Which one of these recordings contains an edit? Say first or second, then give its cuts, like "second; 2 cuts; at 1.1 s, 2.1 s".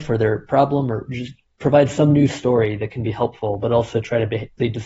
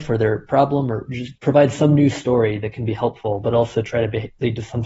second; 1 cut; at 1.4 s